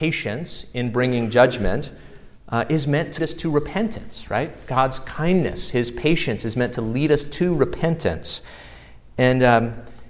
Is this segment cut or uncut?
cut